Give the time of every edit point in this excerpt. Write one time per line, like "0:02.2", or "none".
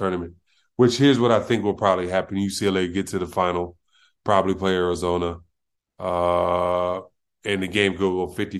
none